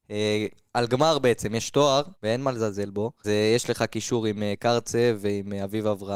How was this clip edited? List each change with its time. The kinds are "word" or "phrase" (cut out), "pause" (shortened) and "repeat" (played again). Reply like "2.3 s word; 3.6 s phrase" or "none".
2.1 s pause; 3.2 s word